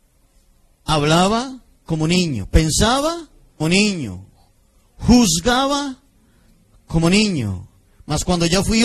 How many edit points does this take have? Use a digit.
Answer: 1